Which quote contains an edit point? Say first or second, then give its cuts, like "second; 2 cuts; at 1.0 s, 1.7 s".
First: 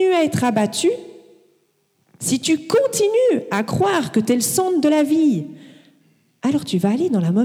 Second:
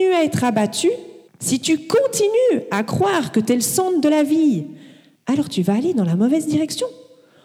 second; 2 cuts; at 1.3 s, 5.2 s